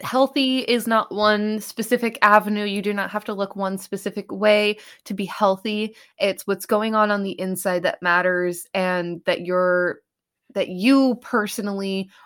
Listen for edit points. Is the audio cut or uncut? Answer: uncut